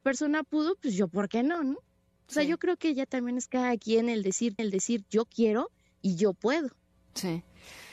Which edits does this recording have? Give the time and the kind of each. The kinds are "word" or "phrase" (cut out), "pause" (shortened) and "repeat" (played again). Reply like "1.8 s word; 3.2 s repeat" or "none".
4.6 s repeat